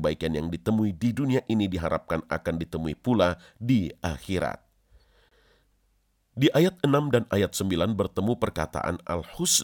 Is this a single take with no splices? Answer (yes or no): yes